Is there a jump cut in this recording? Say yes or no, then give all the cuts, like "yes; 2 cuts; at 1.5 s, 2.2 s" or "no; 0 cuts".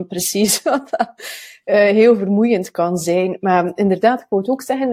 no; 0 cuts